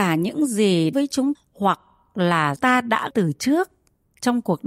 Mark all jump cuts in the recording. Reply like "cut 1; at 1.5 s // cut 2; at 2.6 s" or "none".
cut 1; at 0.9 s // cut 2; at 1.3 s // cut 3; at 2.6 s // cut 4; at 3.1 s